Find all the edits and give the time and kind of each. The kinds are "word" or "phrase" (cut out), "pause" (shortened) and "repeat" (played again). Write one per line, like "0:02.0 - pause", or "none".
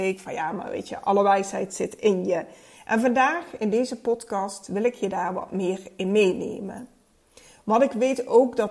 none